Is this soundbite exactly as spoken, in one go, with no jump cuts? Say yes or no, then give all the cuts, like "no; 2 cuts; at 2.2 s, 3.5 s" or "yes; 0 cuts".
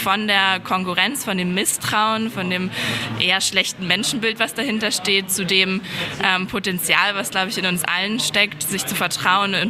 yes; 0 cuts